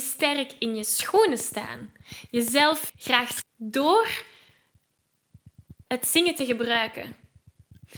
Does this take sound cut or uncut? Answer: cut